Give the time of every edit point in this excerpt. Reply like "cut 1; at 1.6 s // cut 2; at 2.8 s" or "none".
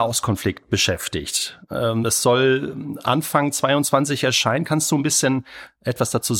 none